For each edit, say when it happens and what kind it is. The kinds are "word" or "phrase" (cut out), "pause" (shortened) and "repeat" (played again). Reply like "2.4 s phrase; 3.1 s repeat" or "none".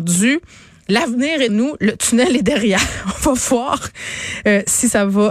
1.5 s word